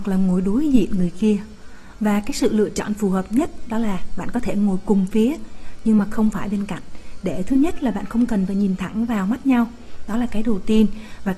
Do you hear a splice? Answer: no; 0 cuts

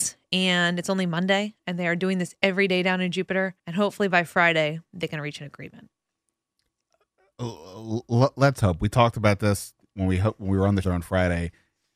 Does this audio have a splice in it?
yes; 2 cuts; at 3.6 s, 10.8 s

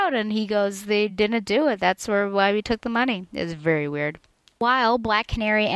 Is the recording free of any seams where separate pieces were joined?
yes; 0 cuts

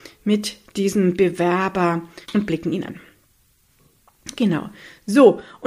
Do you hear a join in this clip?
yes; 2 cuts; at 2.2 s, 2.8 s

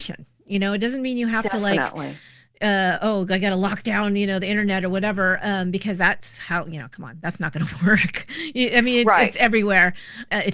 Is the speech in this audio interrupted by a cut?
no; 0 cuts

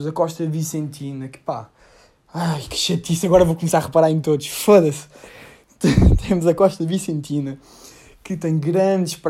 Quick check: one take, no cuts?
yes; 0 cuts

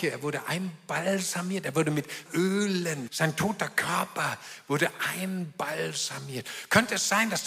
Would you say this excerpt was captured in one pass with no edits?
no; 2 cuts; at 2.3 s, 3.1 s

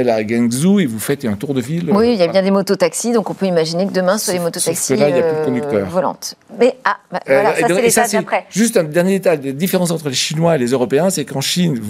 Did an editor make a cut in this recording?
no; 0 cuts

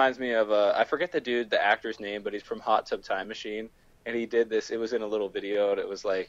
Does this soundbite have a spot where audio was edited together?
no; 0 cuts

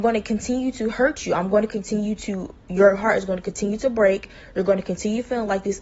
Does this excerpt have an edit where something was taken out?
no; 0 cuts

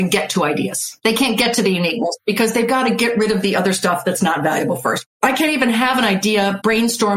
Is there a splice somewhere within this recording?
no; 0 cuts

